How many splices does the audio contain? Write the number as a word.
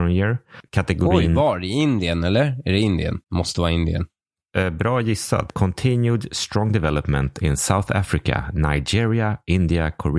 one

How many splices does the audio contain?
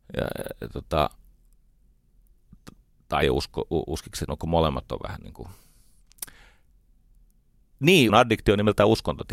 four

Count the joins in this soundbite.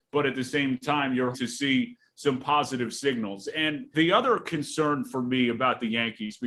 two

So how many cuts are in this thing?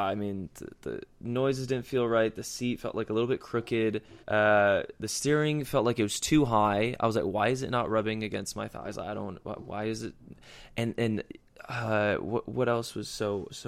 one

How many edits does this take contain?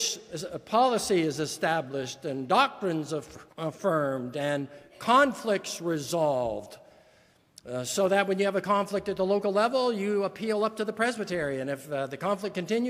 two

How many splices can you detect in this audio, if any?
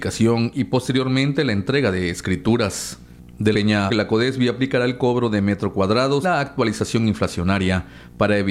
three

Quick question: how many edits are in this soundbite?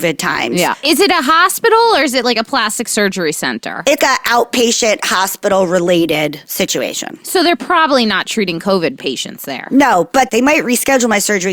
one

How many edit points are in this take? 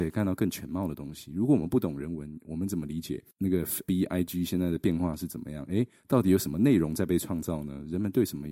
one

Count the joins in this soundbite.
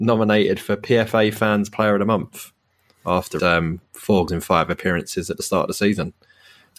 two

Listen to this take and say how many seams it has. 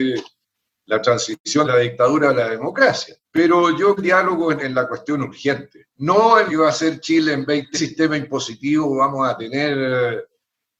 seven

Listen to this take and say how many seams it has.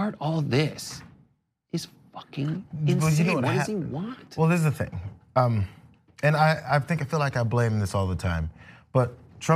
zero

